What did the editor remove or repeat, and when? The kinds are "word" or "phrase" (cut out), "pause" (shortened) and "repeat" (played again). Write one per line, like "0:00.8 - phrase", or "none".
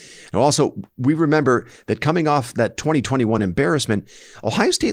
none